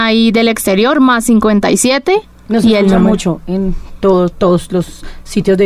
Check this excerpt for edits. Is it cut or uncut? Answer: uncut